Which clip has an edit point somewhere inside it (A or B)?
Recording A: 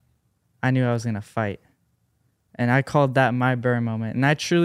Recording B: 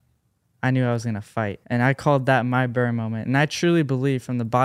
B